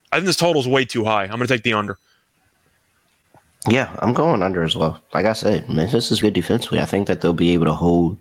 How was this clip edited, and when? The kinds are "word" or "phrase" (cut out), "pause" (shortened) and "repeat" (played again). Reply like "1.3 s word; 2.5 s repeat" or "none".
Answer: 6.2 s word